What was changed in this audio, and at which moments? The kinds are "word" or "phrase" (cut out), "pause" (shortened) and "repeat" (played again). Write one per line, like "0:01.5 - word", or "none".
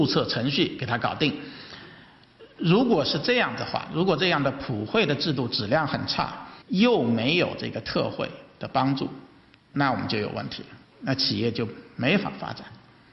0:06.6 - pause
0:09.5 - pause
0:10.8 - pause

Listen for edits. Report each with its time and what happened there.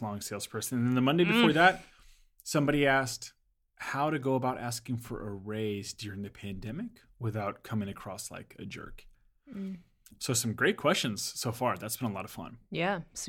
none

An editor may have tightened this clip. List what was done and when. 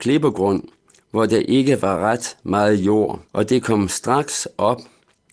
0:03.2 - pause

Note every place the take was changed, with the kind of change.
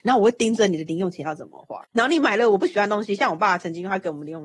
0:01.8 - pause

